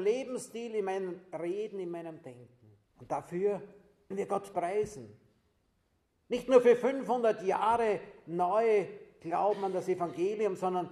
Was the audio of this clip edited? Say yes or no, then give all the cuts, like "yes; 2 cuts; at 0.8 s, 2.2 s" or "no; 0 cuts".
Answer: yes; 3 cuts; at 2.9 s, 4.1 s, 4.5 s